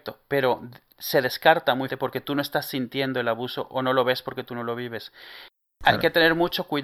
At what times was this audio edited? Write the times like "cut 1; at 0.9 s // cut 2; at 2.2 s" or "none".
cut 1; at 1.9 s

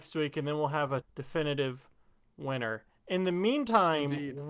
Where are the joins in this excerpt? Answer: cut 1; at 1.0 s

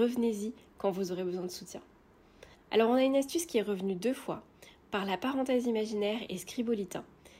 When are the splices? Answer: cut 1; at 2.5 s

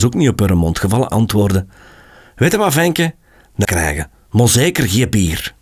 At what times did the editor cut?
cut 1; at 1.1 s // cut 2; at 3.6 s

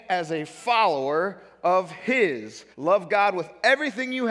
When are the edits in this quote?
cut 1; at 2.7 s

